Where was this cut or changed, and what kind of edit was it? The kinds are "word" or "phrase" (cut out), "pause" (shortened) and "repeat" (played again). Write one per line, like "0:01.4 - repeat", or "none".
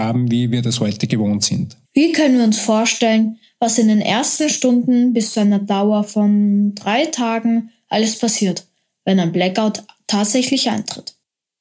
0:01.8 - pause